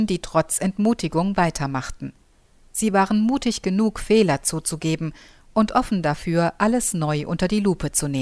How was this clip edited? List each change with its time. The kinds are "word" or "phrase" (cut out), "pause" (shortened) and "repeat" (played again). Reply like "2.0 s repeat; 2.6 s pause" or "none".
none